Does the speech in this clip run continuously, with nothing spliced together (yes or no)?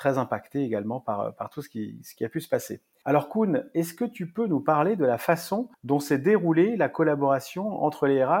yes